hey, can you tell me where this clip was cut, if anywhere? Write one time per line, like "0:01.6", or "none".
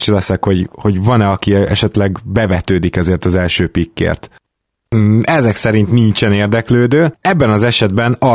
none